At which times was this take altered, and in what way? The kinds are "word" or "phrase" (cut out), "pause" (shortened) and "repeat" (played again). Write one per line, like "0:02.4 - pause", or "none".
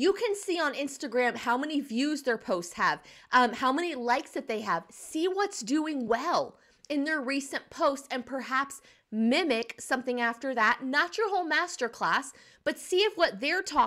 none